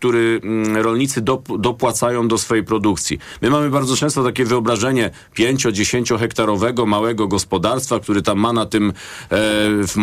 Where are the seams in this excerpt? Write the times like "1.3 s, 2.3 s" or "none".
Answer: none